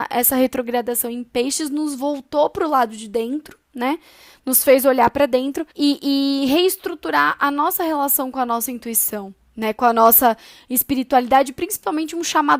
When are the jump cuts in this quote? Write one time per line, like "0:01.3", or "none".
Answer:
0:05.7